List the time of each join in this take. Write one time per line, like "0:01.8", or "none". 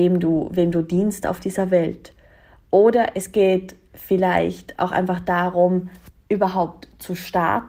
none